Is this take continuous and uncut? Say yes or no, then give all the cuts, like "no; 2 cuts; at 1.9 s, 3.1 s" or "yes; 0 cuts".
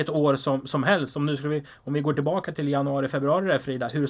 yes; 0 cuts